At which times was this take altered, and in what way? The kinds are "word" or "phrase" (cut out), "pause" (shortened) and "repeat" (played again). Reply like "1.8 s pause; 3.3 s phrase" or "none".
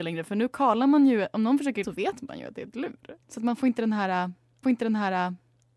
1.8 s word; 3.2 s pause; 4.6 s repeat